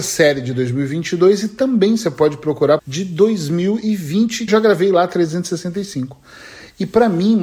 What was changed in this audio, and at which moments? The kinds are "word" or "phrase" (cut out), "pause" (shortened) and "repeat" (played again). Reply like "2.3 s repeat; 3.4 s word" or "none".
2.8 s word; 4.5 s phrase